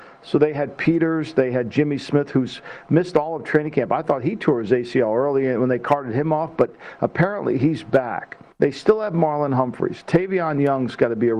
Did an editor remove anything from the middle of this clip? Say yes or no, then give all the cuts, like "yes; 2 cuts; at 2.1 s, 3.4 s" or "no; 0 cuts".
yes; 1 cut; at 8.5 s